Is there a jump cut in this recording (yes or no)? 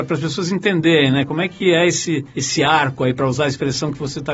yes